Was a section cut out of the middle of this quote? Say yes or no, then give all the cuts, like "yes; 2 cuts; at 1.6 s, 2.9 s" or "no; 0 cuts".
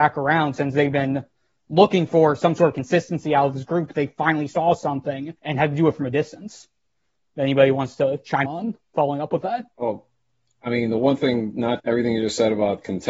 yes; 4 cuts; at 5.4 s, 8.4 s, 9.7 s, 11.8 s